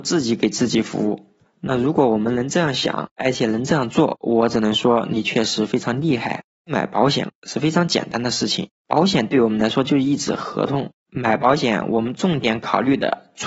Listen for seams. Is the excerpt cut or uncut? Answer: uncut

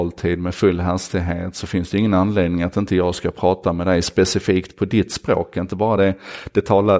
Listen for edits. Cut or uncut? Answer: uncut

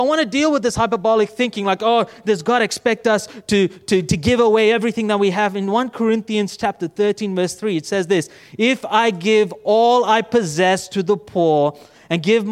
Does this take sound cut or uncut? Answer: uncut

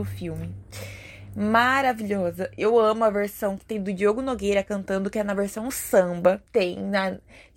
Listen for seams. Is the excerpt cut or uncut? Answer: cut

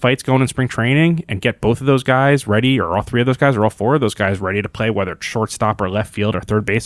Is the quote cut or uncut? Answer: uncut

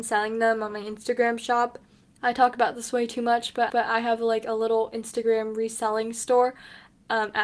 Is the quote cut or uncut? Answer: cut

